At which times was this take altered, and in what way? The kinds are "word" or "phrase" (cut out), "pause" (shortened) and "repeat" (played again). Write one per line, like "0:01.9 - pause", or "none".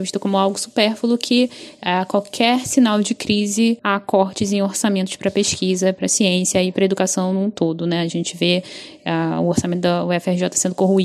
0:03.8 - pause